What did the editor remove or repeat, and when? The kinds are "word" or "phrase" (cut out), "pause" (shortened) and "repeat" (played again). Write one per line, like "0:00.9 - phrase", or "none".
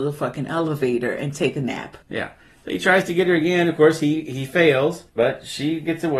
0:02.0 - pause
0:05.1 - pause